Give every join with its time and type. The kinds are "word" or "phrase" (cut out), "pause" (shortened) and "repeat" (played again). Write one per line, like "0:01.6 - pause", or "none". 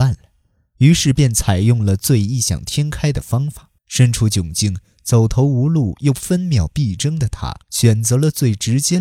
0:03.8 - pause
0:07.6 - pause